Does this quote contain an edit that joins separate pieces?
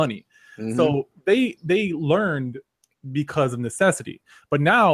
no; 0 cuts

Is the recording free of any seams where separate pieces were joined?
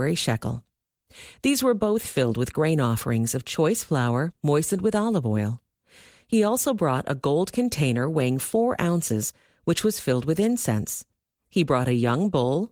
yes; 0 cuts

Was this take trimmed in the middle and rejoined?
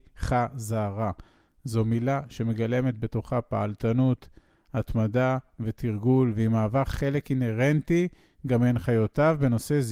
no; 0 cuts

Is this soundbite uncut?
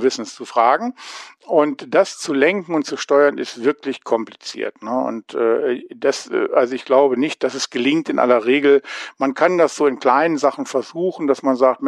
yes; 0 cuts

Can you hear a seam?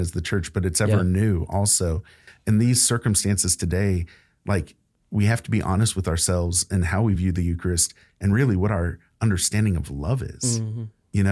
no; 0 cuts

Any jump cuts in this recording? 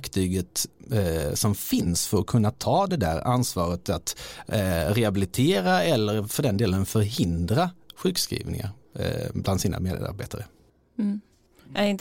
no; 0 cuts

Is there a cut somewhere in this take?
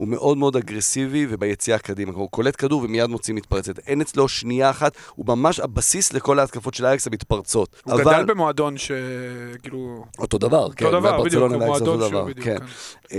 yes; 2 cuts; at 7.8 s, 10.1 s

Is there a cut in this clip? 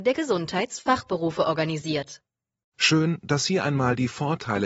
no; 0 cuts

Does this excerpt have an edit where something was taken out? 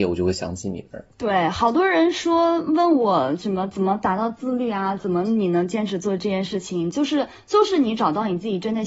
yes; 1 cut; at 1.1 s

